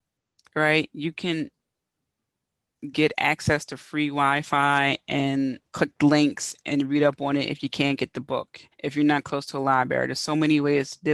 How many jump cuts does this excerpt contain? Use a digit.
2